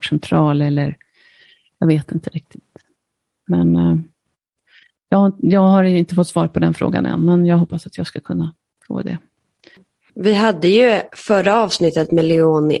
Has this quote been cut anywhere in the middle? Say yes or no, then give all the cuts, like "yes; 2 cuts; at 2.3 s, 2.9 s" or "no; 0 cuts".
no; 0 cuts